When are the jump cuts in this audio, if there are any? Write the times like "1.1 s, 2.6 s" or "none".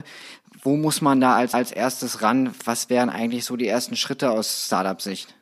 1.5 s